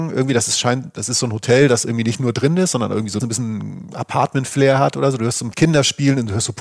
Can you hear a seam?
yes; 2 cuts; at 3.2 s, 5.5 s

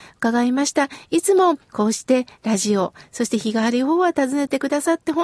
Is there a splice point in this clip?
yes; 1 cut; at 1.6 s

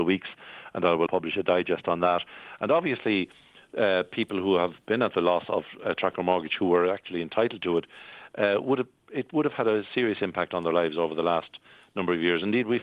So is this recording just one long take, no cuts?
no; 1 cut; at 1.1 s

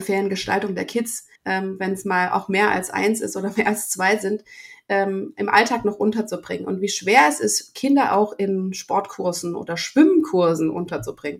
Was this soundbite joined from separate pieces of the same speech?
yes; 1 cut; at 1.4 s

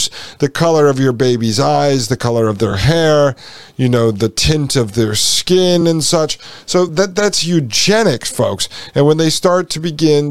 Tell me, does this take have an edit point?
no; 0 cuts

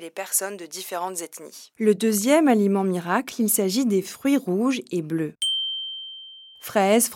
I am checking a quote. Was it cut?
no; 0 cuts

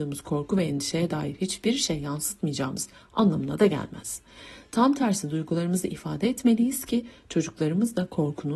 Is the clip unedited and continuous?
yes; 0 cuts

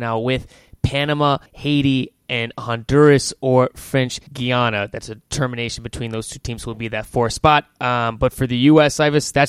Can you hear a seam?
yes; 2 cuts; at 1.5 s, 4.3 s

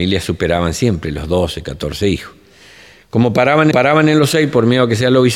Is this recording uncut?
no; 1 cut; at 3.7 s

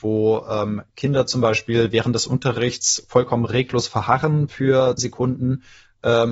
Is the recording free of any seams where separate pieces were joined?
no; 1 cut; at 5.0 s

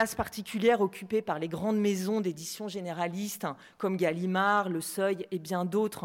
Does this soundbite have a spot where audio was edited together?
no; 0 cuts

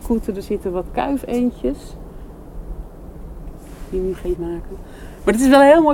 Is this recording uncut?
no; 1 cut; at 4.4 s

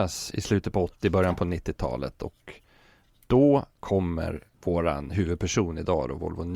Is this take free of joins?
yes; 0 cuts

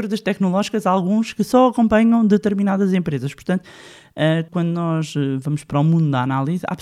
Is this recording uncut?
no; 1 cut; at 4.5 s

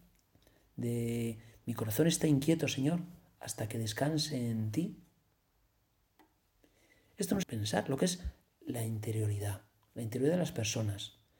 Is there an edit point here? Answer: yes; 1 cut; at 7.4 s

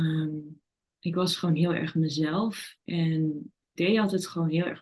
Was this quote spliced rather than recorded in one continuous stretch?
yes; 1 cut; at 3.7 s

